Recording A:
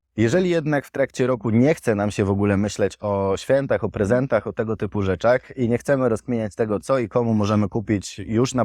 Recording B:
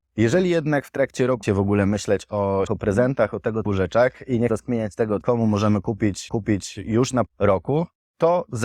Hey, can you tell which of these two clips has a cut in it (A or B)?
B